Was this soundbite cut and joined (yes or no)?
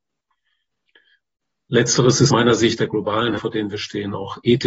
yes